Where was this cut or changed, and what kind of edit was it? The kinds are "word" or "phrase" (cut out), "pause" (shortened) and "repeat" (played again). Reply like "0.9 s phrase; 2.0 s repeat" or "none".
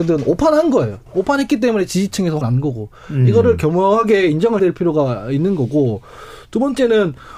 1.1 s pause; 2.4 s word; 4.6 s word